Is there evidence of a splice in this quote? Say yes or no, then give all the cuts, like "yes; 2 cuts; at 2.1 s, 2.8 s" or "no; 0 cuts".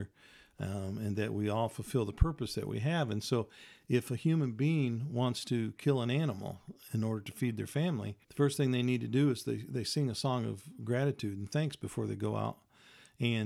yes; 1 cut; at 8.2 s